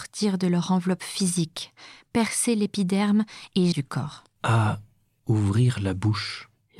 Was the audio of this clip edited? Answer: yes; 1 cut; at 3.7 s

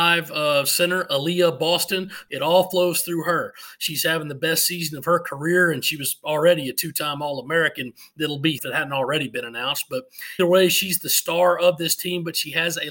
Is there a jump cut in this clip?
yes; 2 cuts; at 8.6 s, 10.4 s

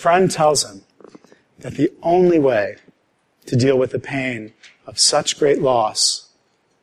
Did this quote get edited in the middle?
no; 0 cuts

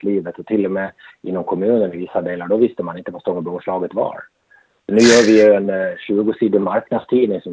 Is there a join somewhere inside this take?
no; 0 cuts

